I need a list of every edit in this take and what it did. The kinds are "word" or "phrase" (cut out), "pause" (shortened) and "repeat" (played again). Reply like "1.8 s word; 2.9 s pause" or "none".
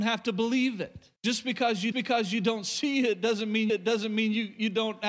1.2 s pause; 1.9 s repeat; 3.7 s repeat